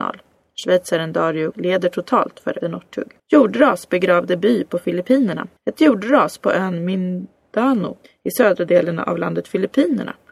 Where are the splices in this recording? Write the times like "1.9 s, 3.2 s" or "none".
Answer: 1.5 s, 2.6 s, 3.2 s, 5.6 s, 8.0 s